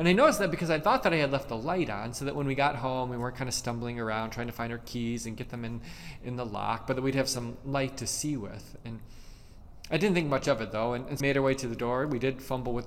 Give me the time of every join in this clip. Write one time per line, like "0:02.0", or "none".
0:11.2